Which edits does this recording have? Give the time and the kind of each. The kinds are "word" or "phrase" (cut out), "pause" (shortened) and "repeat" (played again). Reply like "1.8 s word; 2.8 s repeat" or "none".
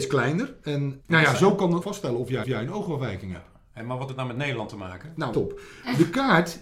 1.0 s word; 1.8 s word; 2.4 s repeat; 4.1 s word; 5.3 s word